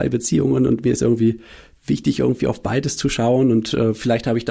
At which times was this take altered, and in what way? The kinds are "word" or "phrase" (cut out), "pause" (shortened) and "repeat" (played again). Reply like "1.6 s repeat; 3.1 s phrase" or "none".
none